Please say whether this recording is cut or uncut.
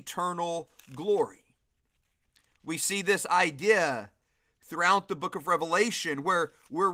uncut